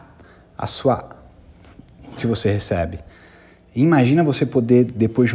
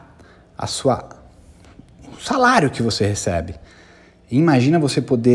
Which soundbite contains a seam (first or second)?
first